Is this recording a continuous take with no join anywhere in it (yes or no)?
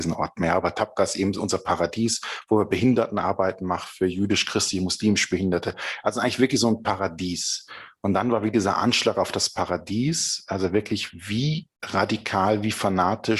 no